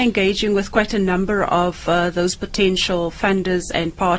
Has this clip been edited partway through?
no; 0 cuts

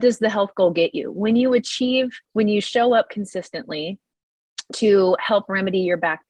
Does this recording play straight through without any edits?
no; 1 cut; at 2.2 s

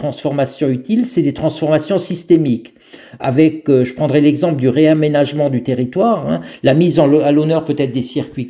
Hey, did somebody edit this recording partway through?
no; 0 cuts

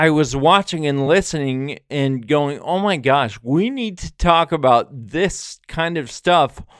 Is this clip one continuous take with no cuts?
yes; 0 cuts

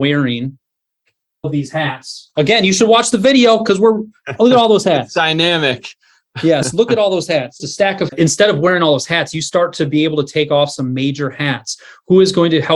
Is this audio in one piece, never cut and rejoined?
no; 3 cuts; at 1.4 s, 7.6 s, 8.1 s

